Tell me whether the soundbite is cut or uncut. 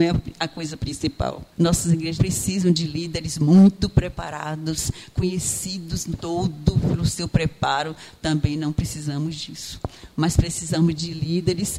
cut